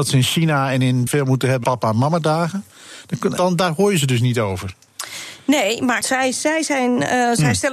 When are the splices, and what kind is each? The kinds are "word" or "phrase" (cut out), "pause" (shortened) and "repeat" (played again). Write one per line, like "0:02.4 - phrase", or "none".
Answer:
0:01.1 - word
0:01.6 - word
0:03.4 - word
0:06.0 - word